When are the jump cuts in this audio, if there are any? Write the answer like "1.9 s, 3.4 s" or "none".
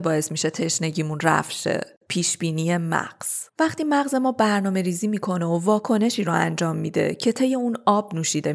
3.5 s